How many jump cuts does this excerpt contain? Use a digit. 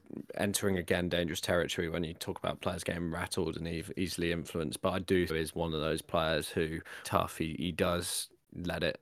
2